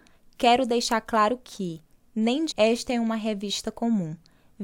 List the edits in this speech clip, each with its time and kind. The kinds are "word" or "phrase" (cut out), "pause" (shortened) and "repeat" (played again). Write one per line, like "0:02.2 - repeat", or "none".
0:02.5 - word